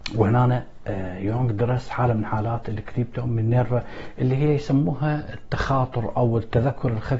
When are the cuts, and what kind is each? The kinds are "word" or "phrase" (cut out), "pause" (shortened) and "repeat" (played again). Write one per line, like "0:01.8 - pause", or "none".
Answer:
none